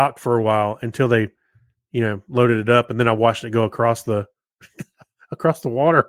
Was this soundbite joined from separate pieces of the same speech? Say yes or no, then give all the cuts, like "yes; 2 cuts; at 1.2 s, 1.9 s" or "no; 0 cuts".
no; 0 cuts